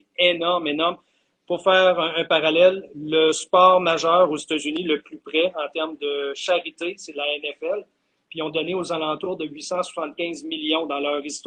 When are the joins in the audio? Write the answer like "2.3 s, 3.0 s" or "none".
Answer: none